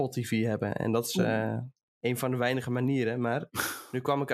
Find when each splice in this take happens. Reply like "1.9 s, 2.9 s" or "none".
1.8 s